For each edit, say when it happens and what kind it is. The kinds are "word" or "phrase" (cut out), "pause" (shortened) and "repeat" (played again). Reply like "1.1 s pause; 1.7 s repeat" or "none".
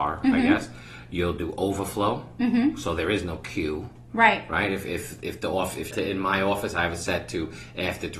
5.9 s phrase